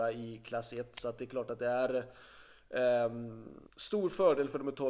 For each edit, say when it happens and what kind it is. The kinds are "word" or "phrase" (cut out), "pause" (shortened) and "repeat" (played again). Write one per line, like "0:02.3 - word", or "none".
0:03.7 - pause